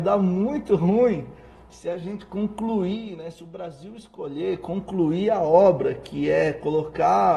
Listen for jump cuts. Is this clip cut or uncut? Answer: uncut